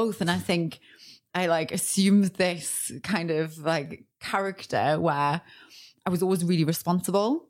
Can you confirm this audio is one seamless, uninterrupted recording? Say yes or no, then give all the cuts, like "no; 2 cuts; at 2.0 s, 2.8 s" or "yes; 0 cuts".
yes; 0 cuts